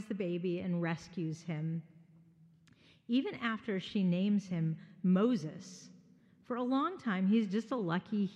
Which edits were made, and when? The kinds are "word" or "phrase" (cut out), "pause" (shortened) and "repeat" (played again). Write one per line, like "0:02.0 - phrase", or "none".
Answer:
none